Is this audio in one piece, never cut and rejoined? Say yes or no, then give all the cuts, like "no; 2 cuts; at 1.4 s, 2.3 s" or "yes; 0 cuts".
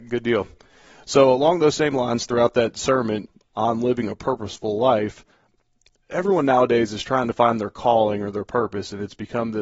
yes; 0 cuts